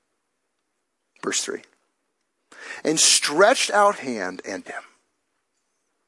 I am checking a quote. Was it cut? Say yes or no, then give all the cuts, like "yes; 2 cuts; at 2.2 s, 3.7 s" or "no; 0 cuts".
yes; 3 cuts; at 3.0 s, 4.0 s, 4.7 s